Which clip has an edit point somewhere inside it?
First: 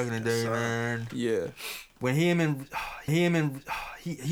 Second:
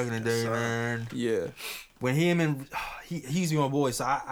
first; 1 cut; at 3.1 s

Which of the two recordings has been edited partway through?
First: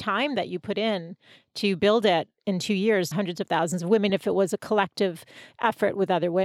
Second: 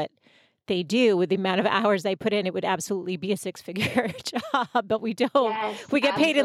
first; 2 cuts; at 3.1 s, 4.1 s

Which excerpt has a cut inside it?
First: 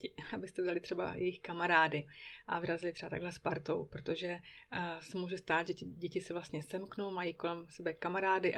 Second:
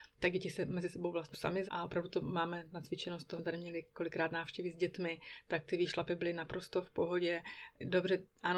second; 3 cuts; at 1.3 s, 1.7 s, 3.4 s

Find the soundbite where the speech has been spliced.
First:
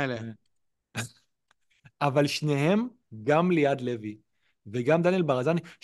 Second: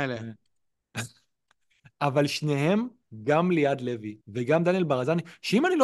second; 1 cut; at 4.2 s

